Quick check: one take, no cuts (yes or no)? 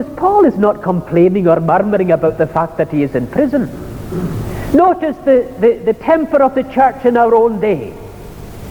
yes